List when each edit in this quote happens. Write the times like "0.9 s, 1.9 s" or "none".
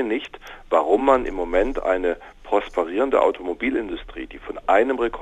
none